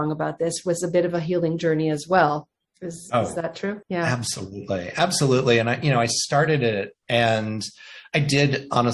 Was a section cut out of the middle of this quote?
yes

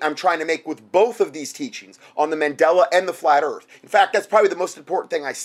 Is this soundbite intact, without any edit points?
yes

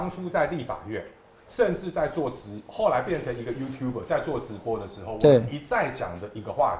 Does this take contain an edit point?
no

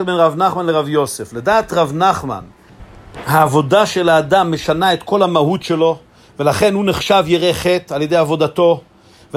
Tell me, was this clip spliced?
no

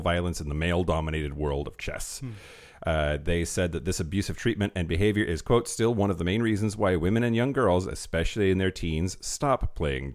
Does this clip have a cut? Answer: no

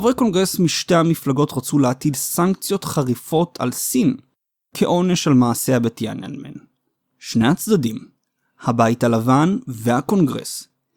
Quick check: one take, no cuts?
yes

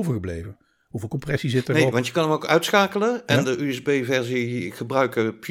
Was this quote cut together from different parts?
no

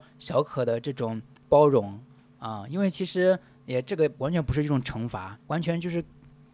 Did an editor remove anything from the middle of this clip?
yes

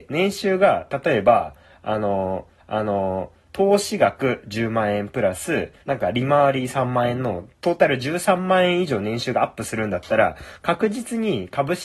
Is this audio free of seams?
no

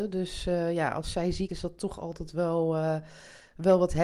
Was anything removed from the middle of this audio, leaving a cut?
yes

